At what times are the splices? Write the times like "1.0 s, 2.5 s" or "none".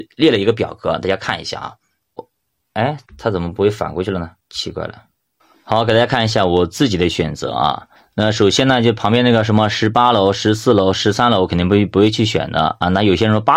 3.1 s, 4.4 s, 5.4 s, 8.0 s